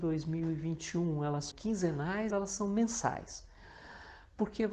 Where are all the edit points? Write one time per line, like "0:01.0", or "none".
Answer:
0:01.5
0:02.3

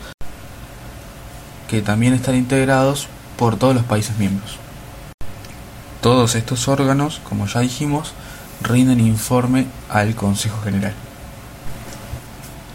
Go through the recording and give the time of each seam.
none

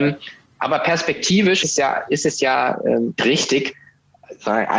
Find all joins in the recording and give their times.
0:01.6
0:03.2

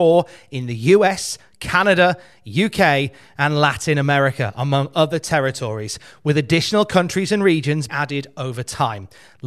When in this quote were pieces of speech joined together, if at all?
0:07.9

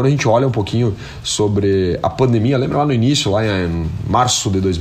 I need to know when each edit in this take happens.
none

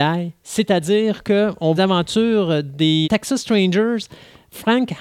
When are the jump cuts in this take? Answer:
0:01.8
0:03.0

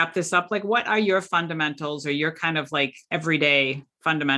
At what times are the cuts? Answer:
0:03.0

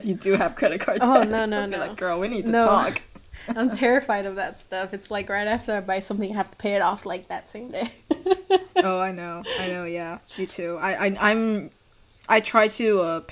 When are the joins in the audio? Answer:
none

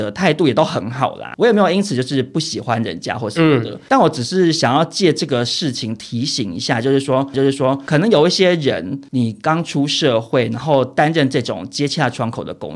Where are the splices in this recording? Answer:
0:07.3

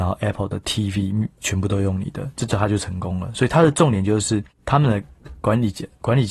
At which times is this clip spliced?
0:01.4
0:04.5

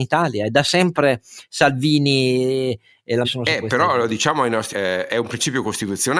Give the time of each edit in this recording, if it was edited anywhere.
0:03.2
0:04.7

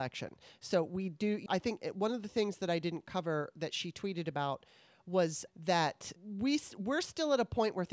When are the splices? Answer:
0:01.5
0:05.5
0:06.2

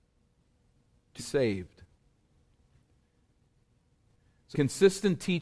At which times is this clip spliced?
0:01.2
0:04.5

